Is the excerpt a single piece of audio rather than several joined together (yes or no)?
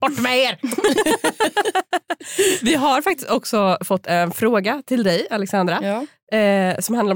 yes